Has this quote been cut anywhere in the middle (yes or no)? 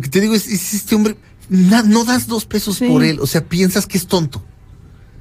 yes